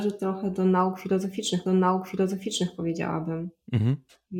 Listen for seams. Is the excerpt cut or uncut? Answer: cut